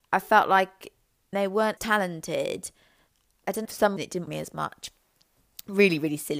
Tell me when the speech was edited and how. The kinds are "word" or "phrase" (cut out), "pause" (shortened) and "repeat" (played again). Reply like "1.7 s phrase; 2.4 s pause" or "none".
1.3 s word; 1.8 s word; 3.6 s word; 4.0 s word; 4.3 s word